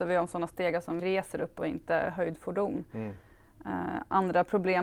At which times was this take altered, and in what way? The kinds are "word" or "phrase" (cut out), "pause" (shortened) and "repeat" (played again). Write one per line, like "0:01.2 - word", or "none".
0:01.0 - word